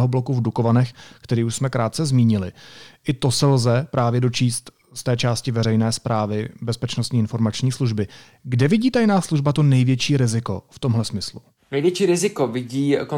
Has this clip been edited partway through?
no; 0 cuts

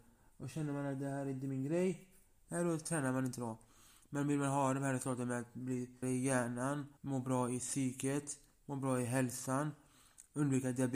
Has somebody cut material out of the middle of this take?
yes; 2 cuts; at 6.0 s, 7.0 s

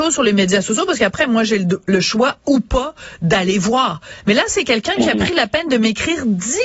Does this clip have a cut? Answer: no; 0 cuts

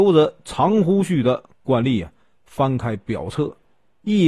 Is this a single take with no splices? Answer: yes; 0 cuts

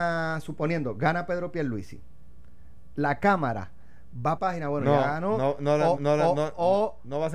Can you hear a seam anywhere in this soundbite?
yes; 2 cuts; at 4.4 s, 6.0 s

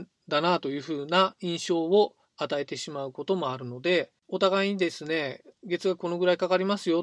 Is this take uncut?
no; 2 cuts; at 2.2 s, 4.2 s

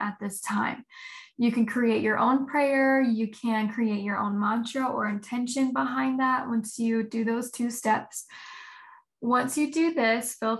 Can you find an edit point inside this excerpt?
no; 0 cuts

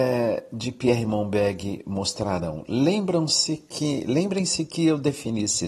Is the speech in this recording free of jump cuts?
yes; 0 cuts

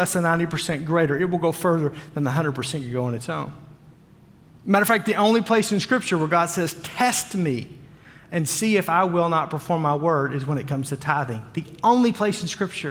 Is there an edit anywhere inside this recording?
no; 0 cuts

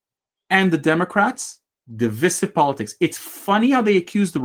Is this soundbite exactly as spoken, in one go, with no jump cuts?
no; 1 cut; at 1.7 s

